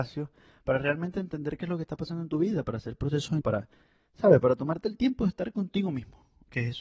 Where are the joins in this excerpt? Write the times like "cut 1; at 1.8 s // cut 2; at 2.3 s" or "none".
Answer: cut 1; at 3.4 s